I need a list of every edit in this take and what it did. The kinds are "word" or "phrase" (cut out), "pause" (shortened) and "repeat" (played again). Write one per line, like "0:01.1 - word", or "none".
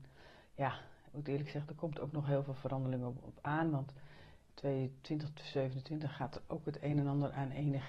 none